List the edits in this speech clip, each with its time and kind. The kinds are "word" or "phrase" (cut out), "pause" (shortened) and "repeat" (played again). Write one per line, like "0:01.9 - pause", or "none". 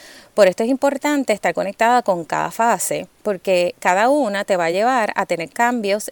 none